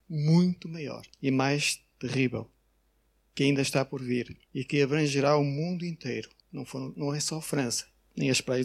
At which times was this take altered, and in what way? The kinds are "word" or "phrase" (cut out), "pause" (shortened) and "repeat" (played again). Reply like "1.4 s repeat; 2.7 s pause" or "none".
1.1 s pause; 1.9 s pause; 4.4 s pause; 6.4 s pause